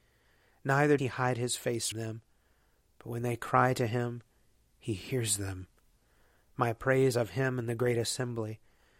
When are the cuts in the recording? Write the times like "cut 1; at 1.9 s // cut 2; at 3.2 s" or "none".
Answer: cut 1; at 1.0 s // cut 2; at 1.9 s // cut 3; at 7.1 s